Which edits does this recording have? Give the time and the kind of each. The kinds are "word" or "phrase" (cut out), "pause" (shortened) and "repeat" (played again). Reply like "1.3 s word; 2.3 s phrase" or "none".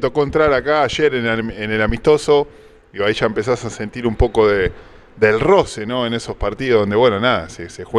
none